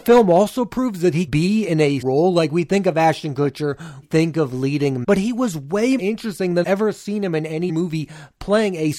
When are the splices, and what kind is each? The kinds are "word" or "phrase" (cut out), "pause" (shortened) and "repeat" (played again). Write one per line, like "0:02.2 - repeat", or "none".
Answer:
0:01.3 - word
0:02.0 - word
0:04.0 - word
0:05.0 - word
0:06.0 - word
0:06.6 - word
0:07.7 - word